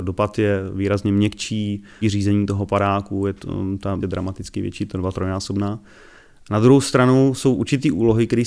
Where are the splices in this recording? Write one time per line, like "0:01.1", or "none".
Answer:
0:02.0
0:04.0